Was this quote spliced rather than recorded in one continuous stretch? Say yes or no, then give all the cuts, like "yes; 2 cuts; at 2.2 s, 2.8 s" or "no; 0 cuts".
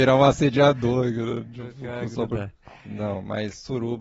no; 0 cuts